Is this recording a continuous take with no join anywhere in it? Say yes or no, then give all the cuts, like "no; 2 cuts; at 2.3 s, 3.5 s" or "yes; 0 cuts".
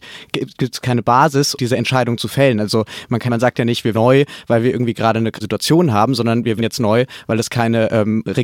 no; 5 cuts; at 1.6 s, 3.3 s, 3.9 s, 5.4 s, 6.6 s